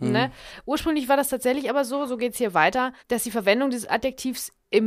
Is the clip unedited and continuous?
no; 1 cut; at 3.0 s

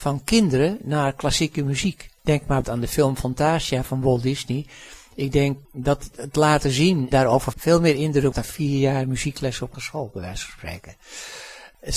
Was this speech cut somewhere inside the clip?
yes; 7 cuts; at 2.2 s, 2.6 s, 5.6 s, 7.1 s, 7.5 s, 8.3 s, 9.7 s

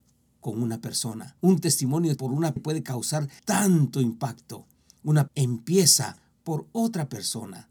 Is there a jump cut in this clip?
yes; 5 cuts; at 1.4 s, 2.2 s, 2.6 s, 3.4 s, 5.3 s

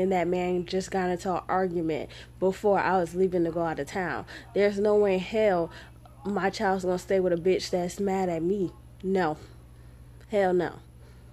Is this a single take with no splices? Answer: yes; 0 cuts

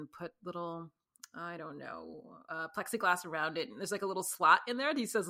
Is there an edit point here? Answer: no; 0 cuts

